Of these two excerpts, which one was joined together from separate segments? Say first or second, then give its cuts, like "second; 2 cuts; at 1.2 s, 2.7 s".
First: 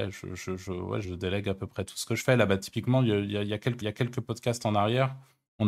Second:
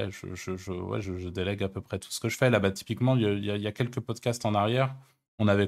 first; 2 cuts; at 1.0 s, 3.8 s